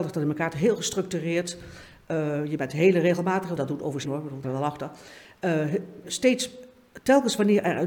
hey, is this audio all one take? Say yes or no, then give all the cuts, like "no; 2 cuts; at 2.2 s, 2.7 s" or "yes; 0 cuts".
no; 5 cuts; at 2.6 s, 3.6 s, 4.1 s, 4.4 s, 6.0 s